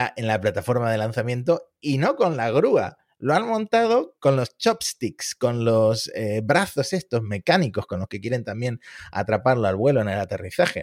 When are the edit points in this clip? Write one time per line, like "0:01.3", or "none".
none